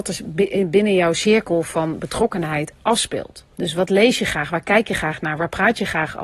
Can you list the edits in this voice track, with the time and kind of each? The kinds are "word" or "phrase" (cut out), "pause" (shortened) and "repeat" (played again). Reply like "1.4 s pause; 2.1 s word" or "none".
3.5 s pause